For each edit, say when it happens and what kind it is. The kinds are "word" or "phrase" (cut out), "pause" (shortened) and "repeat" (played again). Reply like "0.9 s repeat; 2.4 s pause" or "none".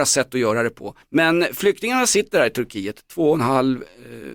1.0 s pause